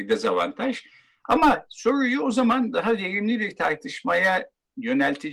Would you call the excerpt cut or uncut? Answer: uncut